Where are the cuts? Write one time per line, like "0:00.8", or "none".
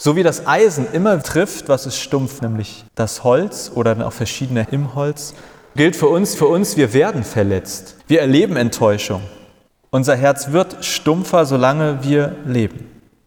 0:01.2
0:02.4
0:02.9
0:04.6
0:05.8
0:06.4
0:08.0
0:09.7